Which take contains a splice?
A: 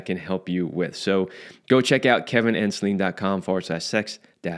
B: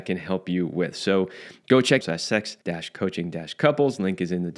B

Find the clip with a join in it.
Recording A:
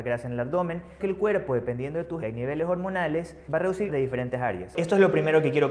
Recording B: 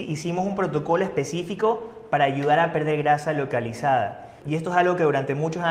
A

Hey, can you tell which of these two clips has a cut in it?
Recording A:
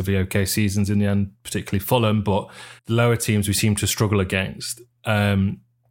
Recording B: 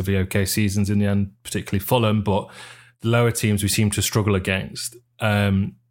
A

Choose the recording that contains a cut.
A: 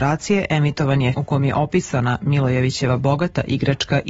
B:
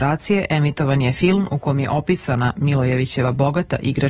A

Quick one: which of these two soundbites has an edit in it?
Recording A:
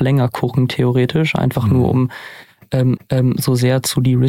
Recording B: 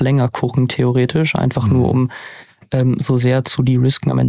A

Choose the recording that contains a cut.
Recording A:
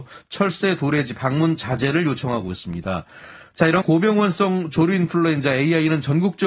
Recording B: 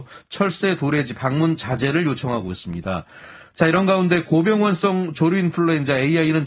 A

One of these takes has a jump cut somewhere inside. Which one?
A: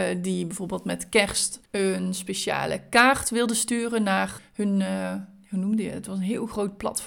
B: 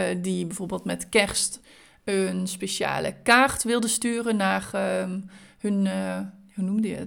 A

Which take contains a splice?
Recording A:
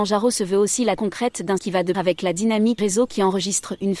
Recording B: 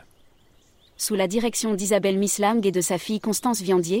A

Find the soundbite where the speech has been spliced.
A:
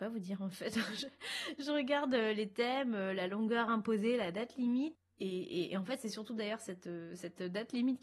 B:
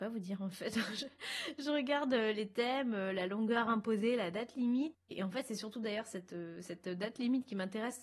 B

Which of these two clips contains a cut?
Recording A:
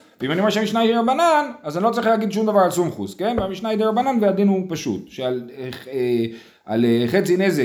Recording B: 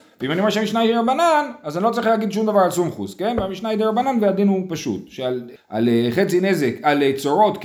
B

